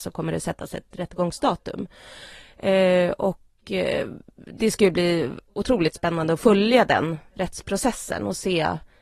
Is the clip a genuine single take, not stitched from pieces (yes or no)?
yes